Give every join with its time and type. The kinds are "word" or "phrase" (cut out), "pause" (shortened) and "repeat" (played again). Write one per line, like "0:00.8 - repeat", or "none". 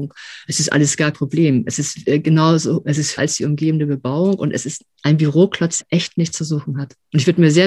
0:01.1 - word
0:03.2 - word
0:05.8 - word